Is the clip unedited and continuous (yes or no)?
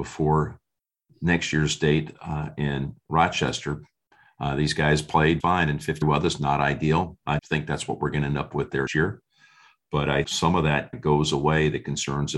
no